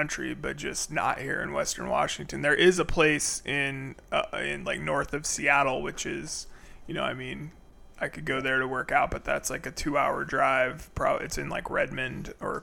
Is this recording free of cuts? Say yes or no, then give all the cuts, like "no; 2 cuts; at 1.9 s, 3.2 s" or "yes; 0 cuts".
yes; 0 cuts